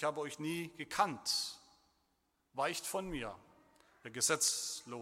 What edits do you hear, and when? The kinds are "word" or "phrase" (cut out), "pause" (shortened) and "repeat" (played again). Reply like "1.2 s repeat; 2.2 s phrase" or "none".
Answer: none